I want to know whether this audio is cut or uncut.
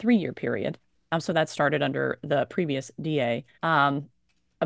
cut